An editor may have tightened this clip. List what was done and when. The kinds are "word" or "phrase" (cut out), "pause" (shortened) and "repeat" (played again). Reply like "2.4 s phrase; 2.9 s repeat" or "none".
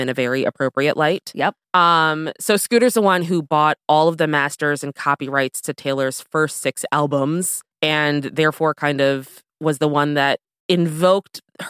1.6 s pause; 7.7 s pause; 9.5 s pause